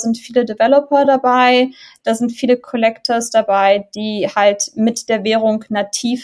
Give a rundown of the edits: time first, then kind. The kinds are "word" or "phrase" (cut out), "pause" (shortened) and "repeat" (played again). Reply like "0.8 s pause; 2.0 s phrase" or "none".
none